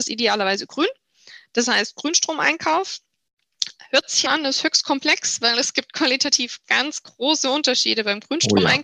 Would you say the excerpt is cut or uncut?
cut